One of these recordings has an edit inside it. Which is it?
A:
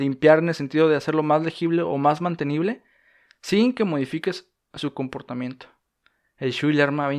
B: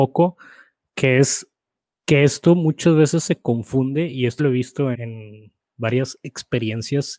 B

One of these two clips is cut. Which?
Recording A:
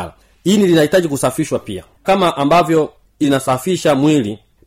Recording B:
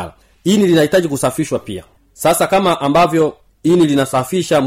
A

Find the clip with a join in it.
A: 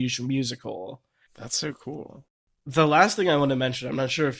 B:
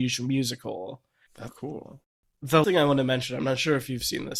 B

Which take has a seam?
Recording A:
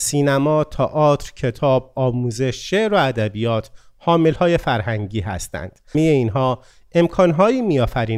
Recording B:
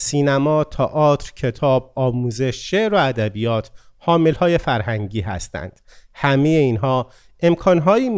A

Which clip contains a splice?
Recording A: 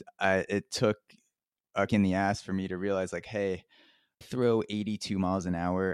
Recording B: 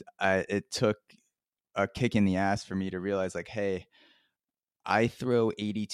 A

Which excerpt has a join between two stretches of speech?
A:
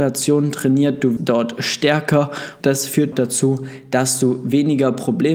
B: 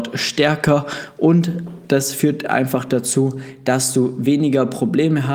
A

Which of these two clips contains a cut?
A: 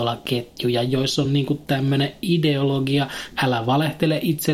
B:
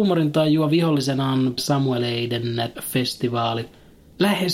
B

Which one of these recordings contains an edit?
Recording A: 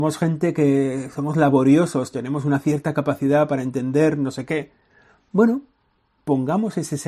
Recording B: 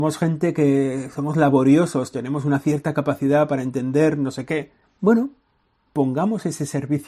B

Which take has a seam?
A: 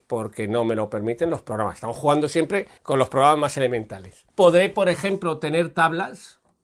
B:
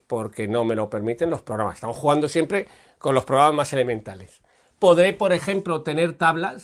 A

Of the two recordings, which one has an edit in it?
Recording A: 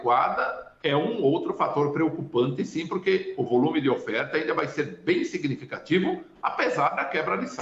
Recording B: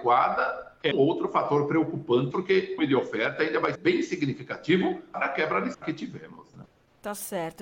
B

